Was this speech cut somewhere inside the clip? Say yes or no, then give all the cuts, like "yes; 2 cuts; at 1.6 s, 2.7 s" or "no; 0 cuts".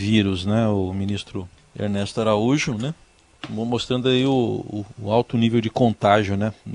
yes; 1 cut; at 1.6 s